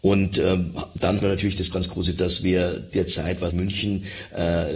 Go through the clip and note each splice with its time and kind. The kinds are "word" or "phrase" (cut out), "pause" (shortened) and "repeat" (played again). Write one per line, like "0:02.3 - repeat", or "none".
0:01.2 - word
0:01.7 - word
0:02.2 - word
0:02.9 - word
0:03.5 - word